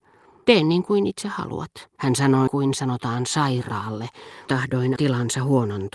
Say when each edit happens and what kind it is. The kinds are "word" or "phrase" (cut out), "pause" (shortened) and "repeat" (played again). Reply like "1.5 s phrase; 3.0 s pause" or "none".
2.0 s pause; 2.5 s word; 4.5 s phrase; 5.0 s word